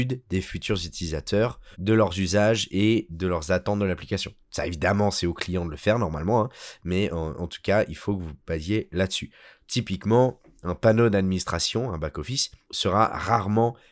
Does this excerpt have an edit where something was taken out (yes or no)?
yes